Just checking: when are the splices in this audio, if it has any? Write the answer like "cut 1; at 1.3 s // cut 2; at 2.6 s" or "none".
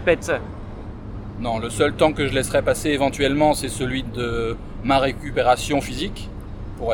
none